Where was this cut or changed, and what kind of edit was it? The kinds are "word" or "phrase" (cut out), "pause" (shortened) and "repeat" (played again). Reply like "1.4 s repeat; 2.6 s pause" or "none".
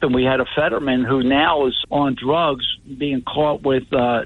1.8 s word